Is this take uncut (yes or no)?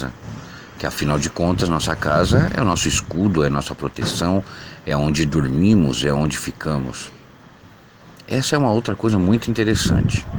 yes